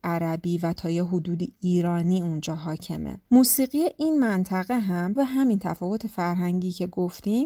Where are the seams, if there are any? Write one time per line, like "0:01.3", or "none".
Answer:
0:05.2